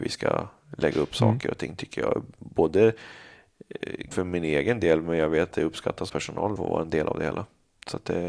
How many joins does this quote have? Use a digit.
4